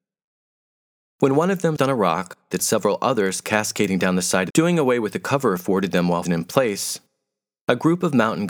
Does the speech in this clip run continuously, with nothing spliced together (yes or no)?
no